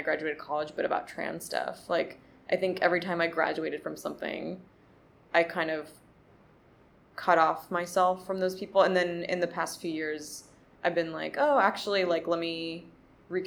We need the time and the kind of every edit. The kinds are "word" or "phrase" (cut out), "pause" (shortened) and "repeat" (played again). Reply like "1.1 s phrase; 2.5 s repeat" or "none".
none